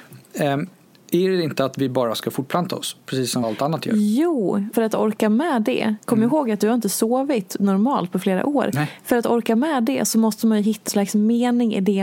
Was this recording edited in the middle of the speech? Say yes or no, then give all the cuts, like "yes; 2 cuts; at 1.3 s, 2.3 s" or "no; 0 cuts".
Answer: yes; 3 cuts; at 3.4 s, 4.7 s, 10.9 s